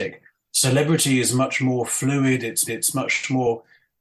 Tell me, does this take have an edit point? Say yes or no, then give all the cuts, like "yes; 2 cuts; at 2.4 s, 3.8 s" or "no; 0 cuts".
yes; 1 cut; at 2.7 s